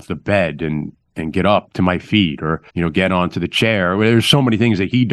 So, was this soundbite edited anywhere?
yes; 1 cut; at 2.7 s

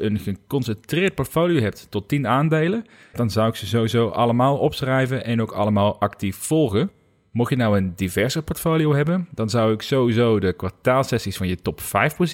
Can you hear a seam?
yes; 1 cut; at 3.1 s

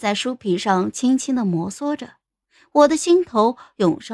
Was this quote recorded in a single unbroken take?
yes; 0 cuts

